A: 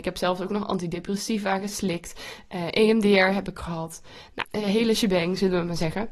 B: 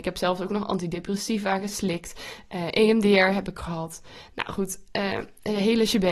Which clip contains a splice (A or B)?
A